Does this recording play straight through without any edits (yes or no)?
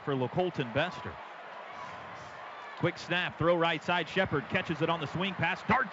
yes